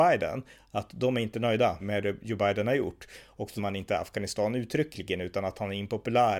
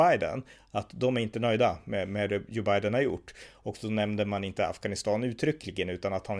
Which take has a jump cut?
first; 2 cuts; at 1.8 s, 3.6 s

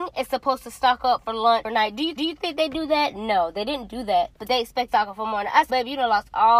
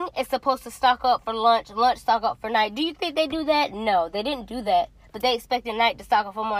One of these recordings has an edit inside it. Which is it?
first; 5 cuts; at 1.6 s, 2.2 s, 4.3 s, 4.9 s, 5.7 s

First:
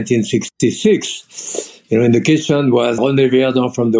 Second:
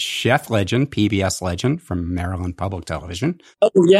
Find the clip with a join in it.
first; 1 cut; at 3.0 s

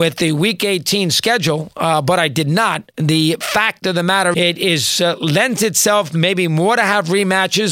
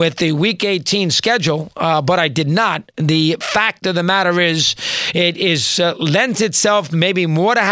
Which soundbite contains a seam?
first; 1 cut; at 4.3 s

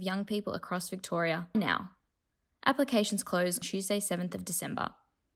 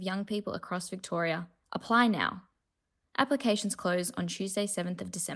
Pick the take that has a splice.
first; 2 cuts; at 1.5 s, 3.6 s

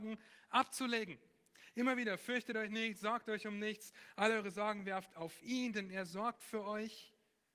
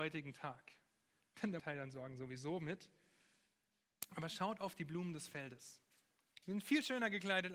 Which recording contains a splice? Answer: second; 1 cut; at 1.6 s

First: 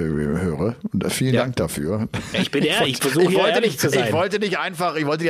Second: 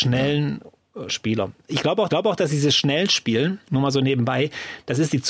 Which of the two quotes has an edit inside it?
second; 3 cuts; at 1.1 s, 2.1 s, 3.6 s

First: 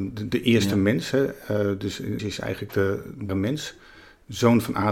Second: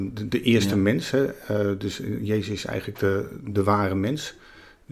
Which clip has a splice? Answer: first; 2 cuts; at 2.2 s, 3.3 s

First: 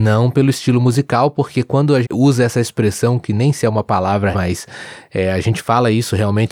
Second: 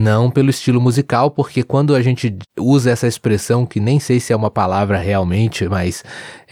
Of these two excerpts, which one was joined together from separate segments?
first; 3 cuts; at 2.0 s, 3.5 s, 4.3 s

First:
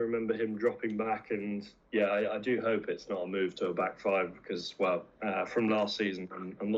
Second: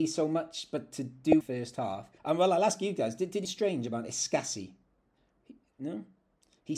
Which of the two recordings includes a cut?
second; 3 cuts; at 1.4 s, 2.2 s, 3.4 s

